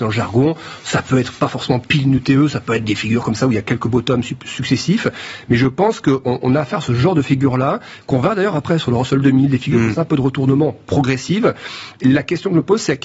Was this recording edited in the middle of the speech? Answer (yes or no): no